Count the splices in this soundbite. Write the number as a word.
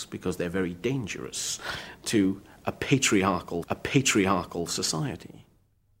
one